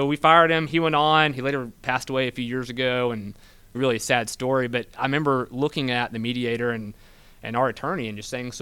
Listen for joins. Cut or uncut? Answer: cut